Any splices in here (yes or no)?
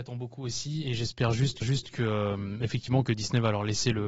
yes